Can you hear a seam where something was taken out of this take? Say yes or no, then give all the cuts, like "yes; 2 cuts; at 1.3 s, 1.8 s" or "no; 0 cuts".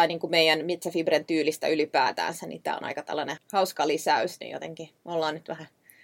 yes; 1 cut; at 3.4 s